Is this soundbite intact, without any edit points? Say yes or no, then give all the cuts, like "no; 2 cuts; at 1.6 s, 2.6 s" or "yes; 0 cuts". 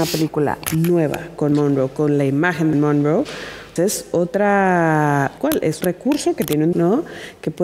no; 6 cuts; at 1.5 s, 2.7 s, 3.8 s, 5.4 s, 5.8 s, 6.7 s